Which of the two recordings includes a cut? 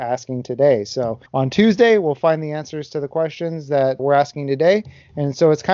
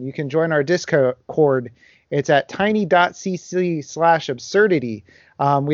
first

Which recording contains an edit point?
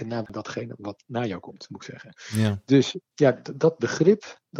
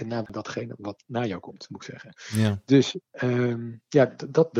first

